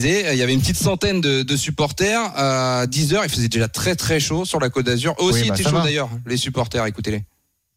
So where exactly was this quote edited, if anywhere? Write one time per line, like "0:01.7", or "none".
none